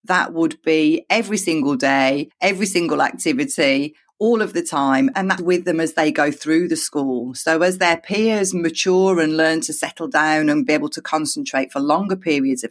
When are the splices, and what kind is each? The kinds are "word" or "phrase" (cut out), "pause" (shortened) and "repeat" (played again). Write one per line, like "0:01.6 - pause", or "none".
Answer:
0:05.4 - word